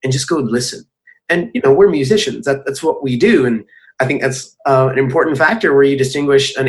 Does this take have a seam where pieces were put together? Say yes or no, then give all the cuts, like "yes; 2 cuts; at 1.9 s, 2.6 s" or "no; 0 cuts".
no; 0 cuts